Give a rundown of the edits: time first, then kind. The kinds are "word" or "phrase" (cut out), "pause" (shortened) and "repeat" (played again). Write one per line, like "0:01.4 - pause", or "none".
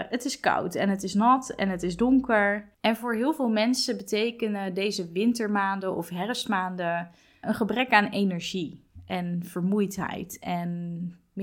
0:02.7 - pause
0:07.4 - word